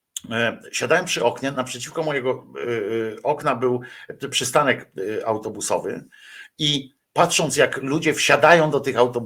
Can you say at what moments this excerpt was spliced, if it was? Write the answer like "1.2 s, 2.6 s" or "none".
7.0 s